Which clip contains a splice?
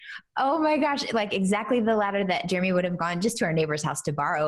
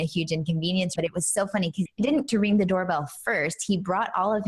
second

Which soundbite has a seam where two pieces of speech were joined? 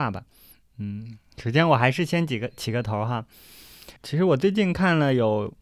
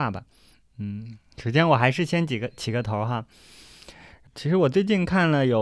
first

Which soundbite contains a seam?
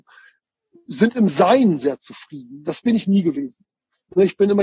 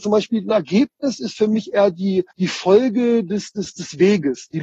second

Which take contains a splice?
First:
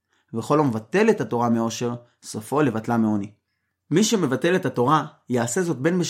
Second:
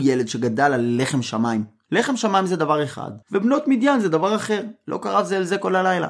second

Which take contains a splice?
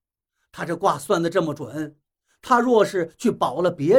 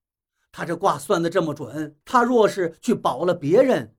second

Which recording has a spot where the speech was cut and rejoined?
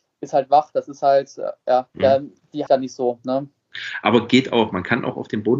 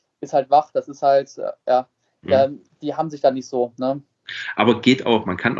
first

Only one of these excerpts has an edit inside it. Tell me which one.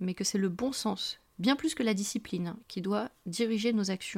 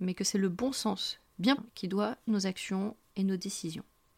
second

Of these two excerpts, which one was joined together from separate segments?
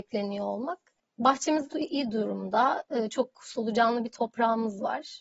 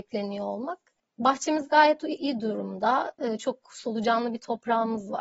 first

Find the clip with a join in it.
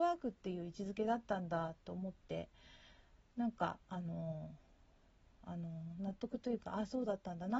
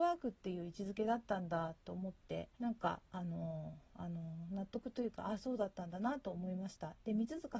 second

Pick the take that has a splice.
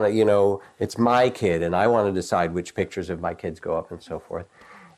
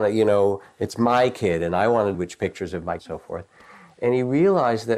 second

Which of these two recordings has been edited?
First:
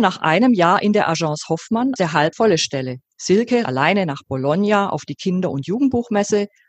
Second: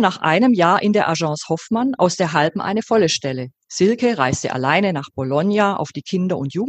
first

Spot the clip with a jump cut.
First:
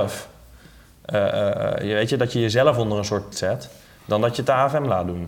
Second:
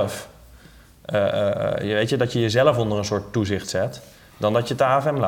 first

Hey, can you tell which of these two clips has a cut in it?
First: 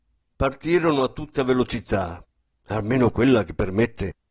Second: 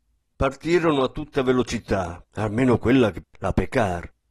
second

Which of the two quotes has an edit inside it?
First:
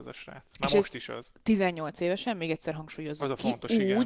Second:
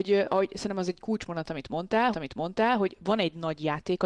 second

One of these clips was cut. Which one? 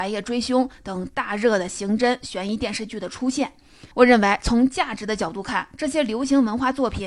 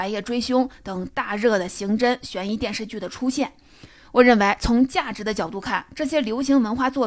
first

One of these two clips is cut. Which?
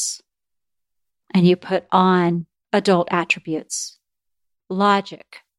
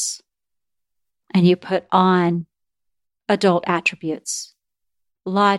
first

